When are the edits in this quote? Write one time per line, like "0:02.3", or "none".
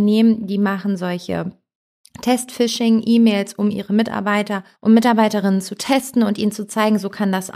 none

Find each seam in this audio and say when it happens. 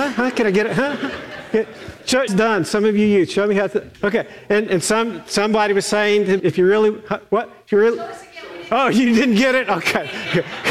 0:02.3
0:03.9
0:06.4

